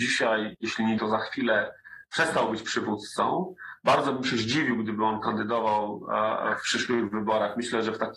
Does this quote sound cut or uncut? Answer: cut